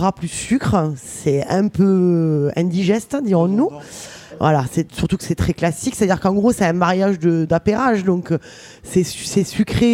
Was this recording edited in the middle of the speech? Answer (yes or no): no